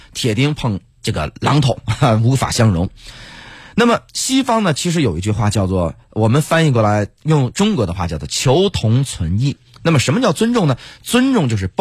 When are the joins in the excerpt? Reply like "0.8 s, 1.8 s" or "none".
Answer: 4.1 s